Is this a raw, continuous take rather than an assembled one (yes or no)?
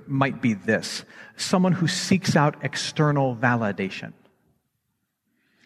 yes